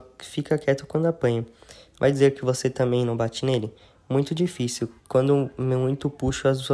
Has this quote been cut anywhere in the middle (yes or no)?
yes